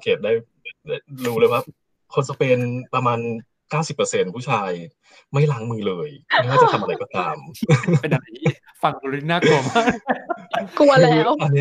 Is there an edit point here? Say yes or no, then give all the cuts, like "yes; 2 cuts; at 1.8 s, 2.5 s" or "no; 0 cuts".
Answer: no; 0 cuts